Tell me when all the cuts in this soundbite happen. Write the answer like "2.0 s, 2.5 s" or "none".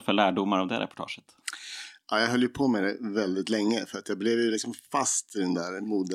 none